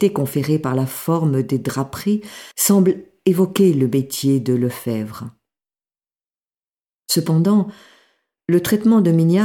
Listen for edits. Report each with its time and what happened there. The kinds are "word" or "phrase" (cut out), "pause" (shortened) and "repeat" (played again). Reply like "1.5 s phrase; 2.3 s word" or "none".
2.5 s pause